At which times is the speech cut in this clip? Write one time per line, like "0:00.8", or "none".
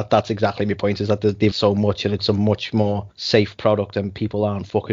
0:01.5
0:03.1